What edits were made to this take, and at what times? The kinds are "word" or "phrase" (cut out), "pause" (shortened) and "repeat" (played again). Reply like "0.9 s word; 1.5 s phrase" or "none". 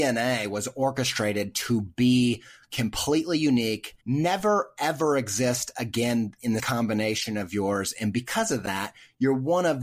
4.0 s pause; 6.6 s word

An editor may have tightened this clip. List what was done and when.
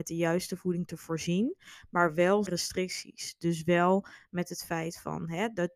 2.5 s word

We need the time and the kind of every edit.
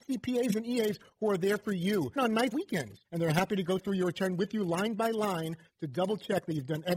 2.2 s word; 2.5 s word; 3.0 s pause

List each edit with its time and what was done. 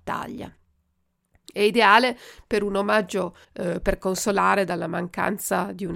3.4 s pause

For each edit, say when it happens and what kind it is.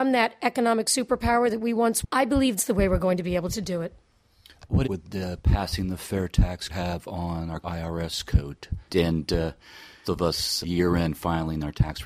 2.0 s word; 2.6 s word; 4.8 s word; 6.7 s word; 7.6 s word; 8.9 s word; 10.0 s word; 10.6 s word

